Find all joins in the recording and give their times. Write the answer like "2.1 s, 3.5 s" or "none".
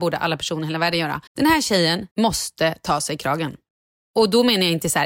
1.3 s, 2.1 s